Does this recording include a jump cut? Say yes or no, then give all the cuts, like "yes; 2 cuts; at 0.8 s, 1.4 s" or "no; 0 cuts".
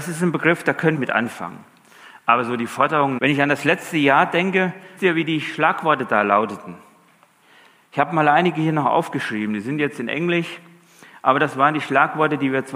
yes; 3 cuts; at 1.0 s, 3.2 s, 5.0 s